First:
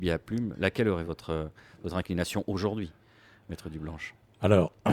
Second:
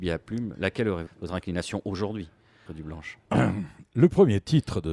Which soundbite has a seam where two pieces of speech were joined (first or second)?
second